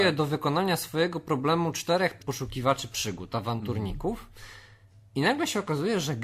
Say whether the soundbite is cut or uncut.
cut